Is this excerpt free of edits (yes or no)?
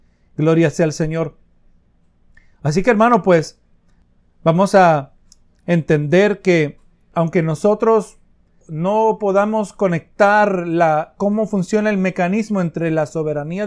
yes